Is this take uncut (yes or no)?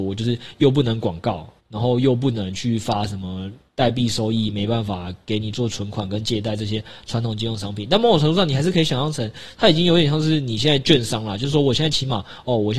no